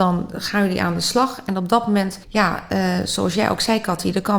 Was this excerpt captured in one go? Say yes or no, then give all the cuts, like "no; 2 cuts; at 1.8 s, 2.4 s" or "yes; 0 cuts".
no; 1 cut; at 2.2 s